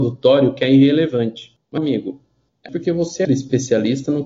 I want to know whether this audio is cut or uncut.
cut